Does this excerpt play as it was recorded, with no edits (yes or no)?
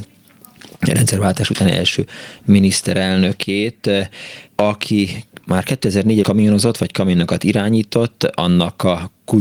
no